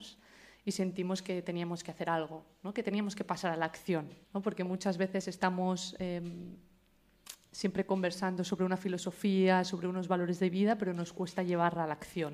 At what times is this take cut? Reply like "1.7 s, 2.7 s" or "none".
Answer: 4.2 s